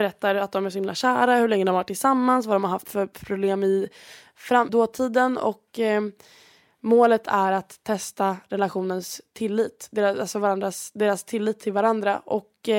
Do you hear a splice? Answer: yes; 2 cuts; at 2.8 s, 4.7 s

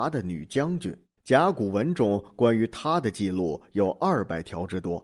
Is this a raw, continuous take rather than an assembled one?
no; 1 cut; at 1.2 s

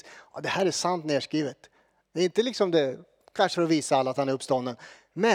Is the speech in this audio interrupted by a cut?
yes; 1 cut; at 3.5 s

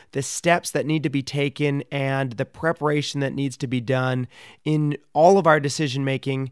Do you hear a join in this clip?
no; 0 cuts

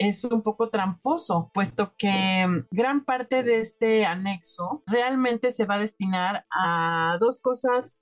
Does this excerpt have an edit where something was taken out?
no; 0 cuts

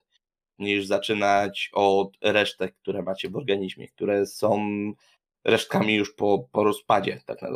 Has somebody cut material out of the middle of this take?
no; 0 cuts

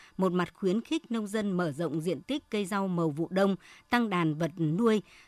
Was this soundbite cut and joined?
no; 0 cuts

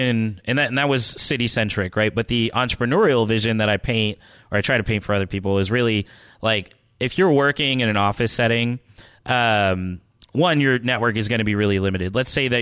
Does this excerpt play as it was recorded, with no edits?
yes; 0 cuts

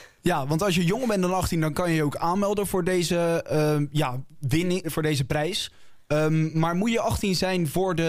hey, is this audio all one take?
no; 1 cut; at 4.8 s

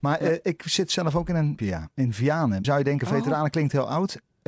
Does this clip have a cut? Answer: yes; 2 cuts; at 1.6 s, 2.6 s

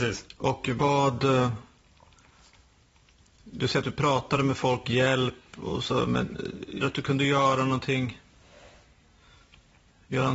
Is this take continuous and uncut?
no; 2 cuts; at 4.8 s, 6.8 s

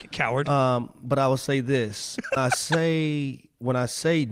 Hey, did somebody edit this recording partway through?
yes; 1 cut; at 2.4 s

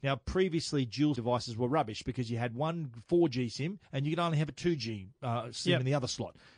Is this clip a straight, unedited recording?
no; 2 cuts; at 1.2 s, 3.8 s

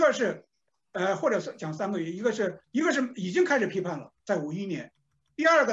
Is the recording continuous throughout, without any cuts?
no; 2 cuts; at 2.6 s, 4.2 s

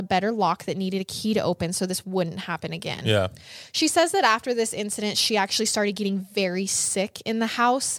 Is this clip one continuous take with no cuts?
yes; 0 cuts

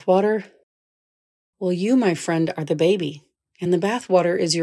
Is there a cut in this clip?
no; 0 cuts

